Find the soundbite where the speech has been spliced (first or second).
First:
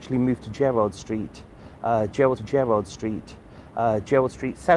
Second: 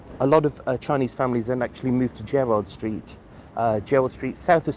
first